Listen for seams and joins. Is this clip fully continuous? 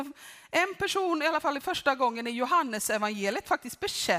yes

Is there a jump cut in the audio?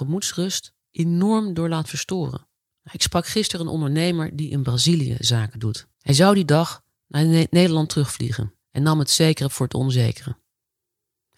yes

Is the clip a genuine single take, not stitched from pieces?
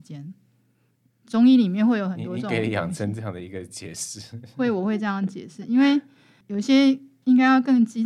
yes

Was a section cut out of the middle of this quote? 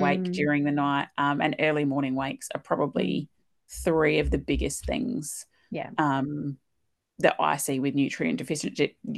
no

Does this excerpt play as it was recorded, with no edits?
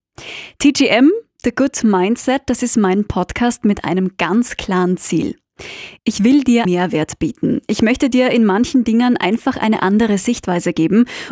no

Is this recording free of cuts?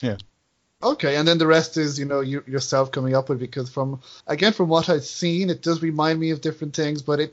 no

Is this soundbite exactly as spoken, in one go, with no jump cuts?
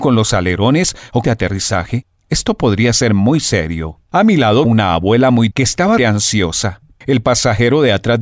no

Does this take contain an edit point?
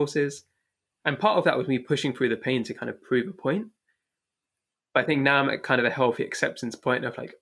no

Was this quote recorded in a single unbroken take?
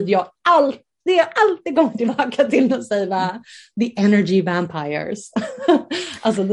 yes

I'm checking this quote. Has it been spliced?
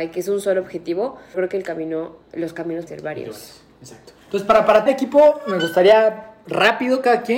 yes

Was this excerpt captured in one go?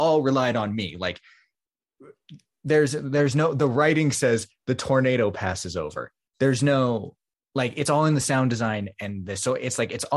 yes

